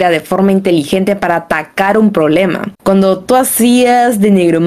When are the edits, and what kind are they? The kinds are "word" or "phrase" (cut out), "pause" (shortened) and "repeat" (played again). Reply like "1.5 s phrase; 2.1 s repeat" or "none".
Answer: 2.7 s pause